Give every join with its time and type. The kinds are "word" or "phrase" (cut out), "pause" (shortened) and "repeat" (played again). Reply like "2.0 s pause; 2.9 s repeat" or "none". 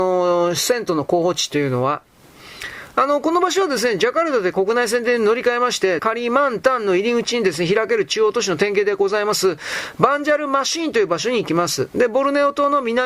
6.0 s word